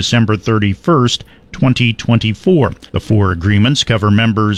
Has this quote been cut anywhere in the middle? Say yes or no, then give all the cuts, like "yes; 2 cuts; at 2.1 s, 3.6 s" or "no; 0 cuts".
yes; 1 cut; at 2.9 s